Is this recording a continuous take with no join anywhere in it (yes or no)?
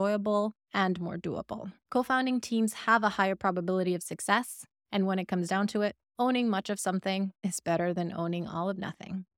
yes